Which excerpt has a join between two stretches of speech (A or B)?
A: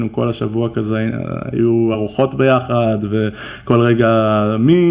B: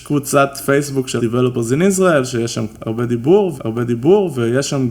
B